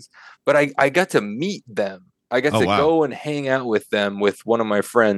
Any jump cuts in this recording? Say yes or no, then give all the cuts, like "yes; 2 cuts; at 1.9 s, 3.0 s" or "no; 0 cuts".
no; 0 cuts